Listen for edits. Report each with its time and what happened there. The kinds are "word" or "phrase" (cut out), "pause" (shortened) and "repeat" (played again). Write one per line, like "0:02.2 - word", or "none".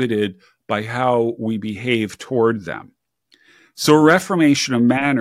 none